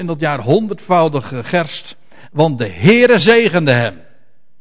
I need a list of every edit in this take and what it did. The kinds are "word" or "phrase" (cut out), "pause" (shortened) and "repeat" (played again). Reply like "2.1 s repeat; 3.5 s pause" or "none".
none